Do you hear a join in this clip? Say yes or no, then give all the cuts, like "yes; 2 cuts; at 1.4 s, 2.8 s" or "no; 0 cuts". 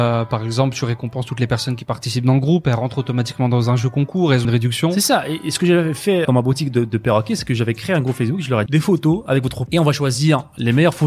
yes; 4 cuts; at 4.4 s, 6.2 s, 8.7 s, 9.7 s